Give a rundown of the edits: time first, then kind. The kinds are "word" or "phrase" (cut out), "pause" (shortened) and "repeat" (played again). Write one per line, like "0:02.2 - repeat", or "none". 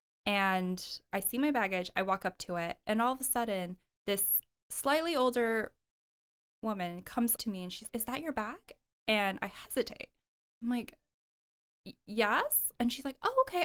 0:01.1 - word
0:07.4 - word
0:07.9 - word